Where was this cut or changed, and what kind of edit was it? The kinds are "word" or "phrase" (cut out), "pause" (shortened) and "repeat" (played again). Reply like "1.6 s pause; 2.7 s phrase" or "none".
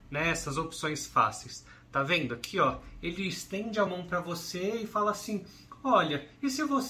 none